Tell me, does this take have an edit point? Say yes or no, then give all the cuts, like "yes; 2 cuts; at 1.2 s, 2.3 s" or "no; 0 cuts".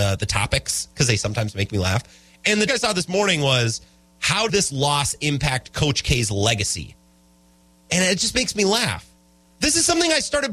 yes; 2 cuts; at 2.7 s, 4.5 s